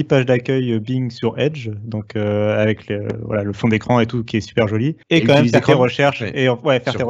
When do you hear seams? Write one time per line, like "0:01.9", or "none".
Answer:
0:05.0